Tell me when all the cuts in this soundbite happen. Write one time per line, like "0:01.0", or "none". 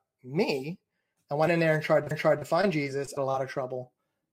0:01.5
0:02.1
0:03.2